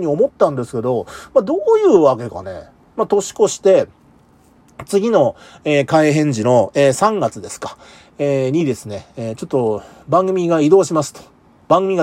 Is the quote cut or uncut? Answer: uncut